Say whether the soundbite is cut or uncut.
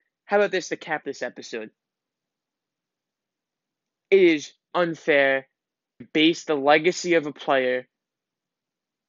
cut